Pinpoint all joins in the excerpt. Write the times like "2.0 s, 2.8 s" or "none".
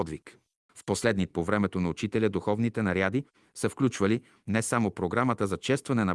1.3 s